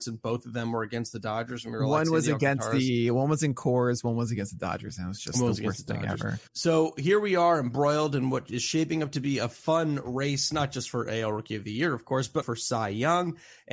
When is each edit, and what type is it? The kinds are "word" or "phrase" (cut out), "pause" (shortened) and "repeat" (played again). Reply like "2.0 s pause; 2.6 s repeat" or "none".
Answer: 6.5 s pause; 12.4 s word